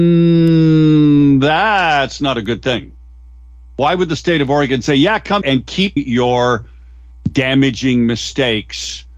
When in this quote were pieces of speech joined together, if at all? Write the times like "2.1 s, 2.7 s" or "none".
5.4 s, 6.0 s